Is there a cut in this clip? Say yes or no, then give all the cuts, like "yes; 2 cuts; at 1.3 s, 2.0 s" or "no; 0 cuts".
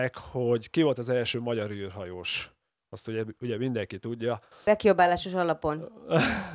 no; 0 cuts